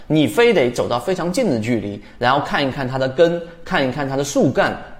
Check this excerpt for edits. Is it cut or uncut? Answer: uncut